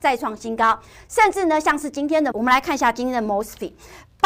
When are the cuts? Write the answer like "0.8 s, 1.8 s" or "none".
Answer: 2.3 s